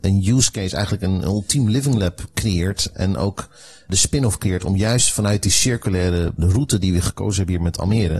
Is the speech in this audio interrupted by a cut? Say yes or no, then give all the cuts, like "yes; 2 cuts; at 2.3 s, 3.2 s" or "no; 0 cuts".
no; 0 cuts